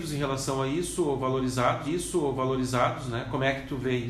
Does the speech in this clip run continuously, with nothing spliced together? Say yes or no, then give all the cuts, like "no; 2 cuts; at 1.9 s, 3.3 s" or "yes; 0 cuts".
no; 1 cut; at 1.9 s